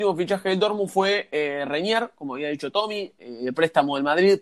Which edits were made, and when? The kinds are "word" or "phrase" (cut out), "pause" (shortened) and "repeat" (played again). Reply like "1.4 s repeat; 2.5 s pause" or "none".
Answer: none